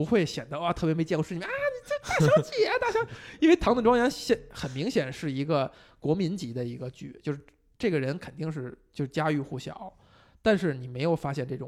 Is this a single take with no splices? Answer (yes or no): yes